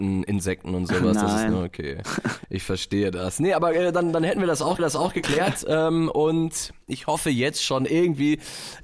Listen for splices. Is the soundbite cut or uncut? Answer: cut